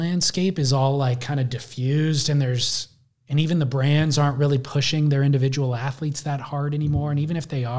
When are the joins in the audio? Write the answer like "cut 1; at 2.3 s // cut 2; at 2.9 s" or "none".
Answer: none